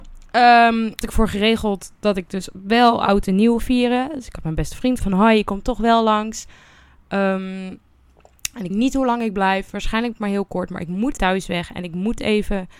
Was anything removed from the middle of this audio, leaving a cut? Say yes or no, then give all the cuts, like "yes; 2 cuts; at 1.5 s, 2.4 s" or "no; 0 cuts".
yes; 6 cuts; at 1.0 s, 3.6 s, 5.0 s, 8.7 s, 10.1 s, 11.2 s